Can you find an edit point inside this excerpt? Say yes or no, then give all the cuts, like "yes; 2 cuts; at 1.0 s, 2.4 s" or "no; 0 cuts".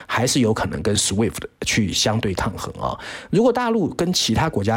no; 0 cuts